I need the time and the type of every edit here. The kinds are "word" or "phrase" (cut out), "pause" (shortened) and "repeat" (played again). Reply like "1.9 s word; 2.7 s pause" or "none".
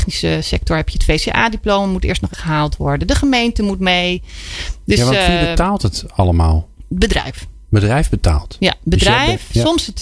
2.3 s word; 7.6 s pause